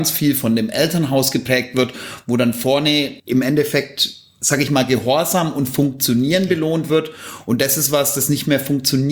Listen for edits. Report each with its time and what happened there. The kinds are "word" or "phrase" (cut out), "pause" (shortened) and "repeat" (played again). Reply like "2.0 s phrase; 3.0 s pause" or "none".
3.2 s pause